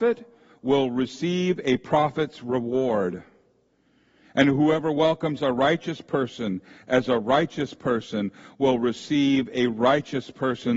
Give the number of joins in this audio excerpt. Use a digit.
0